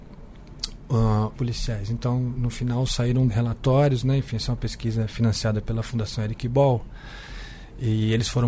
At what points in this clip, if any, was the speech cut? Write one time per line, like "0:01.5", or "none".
0:01.3
0:02.4
0:03.3